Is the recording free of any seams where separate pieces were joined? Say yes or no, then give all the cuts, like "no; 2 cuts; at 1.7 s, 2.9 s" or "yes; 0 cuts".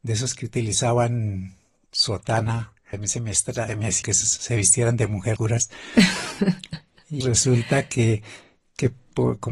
no; 5 cuts; at 2.9 s, 3.7 s, 4.0 s, 5.4 s, 7.2 s